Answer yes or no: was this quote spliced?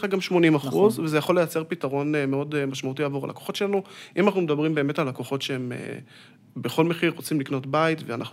no